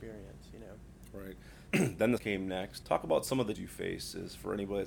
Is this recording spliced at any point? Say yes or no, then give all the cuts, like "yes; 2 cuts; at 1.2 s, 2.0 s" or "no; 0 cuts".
yes; 4 cuts; at 1.7 s, 2.2 s, 2.8 s, 3.5 s